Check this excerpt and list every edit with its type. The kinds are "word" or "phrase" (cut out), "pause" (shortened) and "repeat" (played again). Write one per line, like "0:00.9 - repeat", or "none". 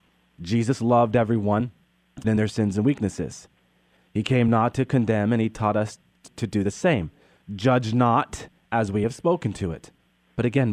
0:02.2 - word

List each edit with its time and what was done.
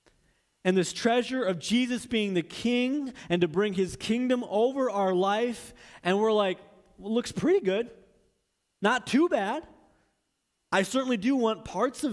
none

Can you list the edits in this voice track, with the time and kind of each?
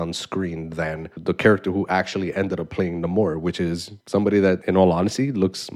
0:04.0 - pause

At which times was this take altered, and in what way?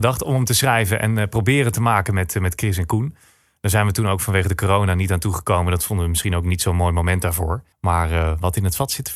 0:07.7 - pause

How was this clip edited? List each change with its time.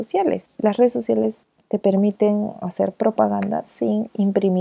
none

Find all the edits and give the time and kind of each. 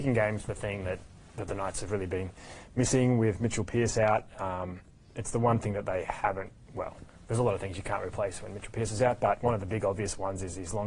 none

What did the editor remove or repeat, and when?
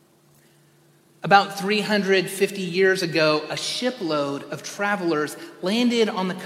none

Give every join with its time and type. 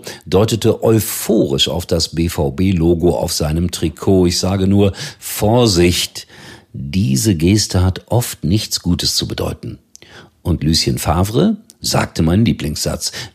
none

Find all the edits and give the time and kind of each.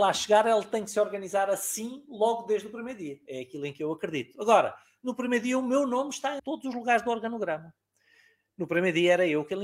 0:06.4 - phrase

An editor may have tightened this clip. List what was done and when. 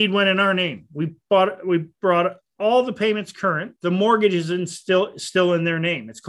0:03.8 - pause

